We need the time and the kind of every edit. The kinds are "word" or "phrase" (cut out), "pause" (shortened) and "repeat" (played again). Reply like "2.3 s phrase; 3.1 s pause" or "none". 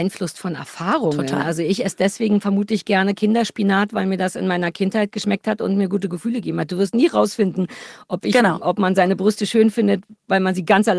none